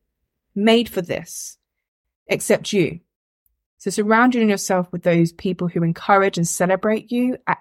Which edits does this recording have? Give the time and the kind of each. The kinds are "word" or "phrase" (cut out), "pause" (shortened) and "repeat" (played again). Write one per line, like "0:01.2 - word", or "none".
none

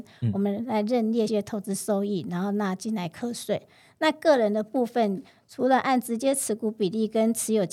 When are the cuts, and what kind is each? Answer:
0:01.3 - word

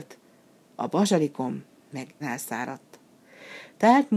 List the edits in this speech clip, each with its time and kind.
0:02.2 - word

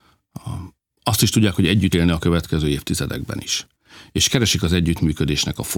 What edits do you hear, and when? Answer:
0:01.9 - word

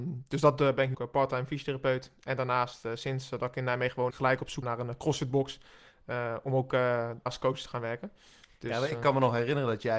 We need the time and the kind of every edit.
0:00.9 - word
0:04.1 - word
0:04.6 - word
0:07.3 - word

